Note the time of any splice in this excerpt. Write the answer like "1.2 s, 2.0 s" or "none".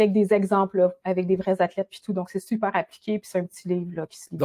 none